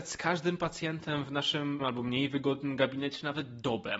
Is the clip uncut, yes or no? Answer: no